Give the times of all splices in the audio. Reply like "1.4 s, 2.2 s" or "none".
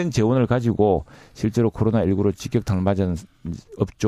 none